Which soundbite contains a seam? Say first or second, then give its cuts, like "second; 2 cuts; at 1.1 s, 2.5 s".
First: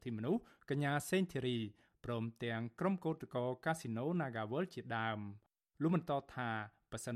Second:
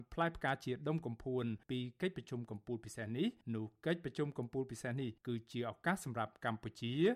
second; 3 cuts; at 1.6 s, 3.4 s, 5.2 s